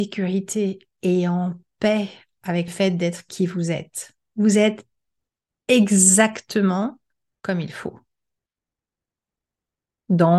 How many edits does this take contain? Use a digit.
1